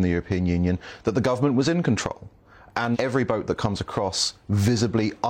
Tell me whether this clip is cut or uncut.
cut